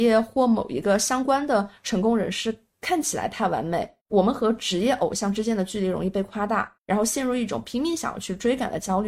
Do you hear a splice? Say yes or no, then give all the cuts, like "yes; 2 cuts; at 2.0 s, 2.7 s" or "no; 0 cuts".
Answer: yes; 2 cuts; at 4.0 s, 6.8 s